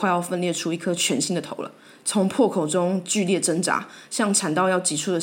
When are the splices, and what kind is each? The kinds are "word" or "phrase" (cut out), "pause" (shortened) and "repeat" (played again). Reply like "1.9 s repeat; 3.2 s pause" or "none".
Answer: none